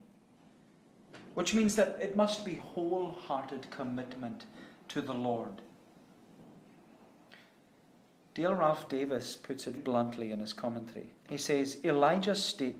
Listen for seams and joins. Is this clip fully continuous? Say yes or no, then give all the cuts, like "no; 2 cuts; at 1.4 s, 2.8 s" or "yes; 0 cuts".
no; 2 cuts; at 9.8 s, 11.2 s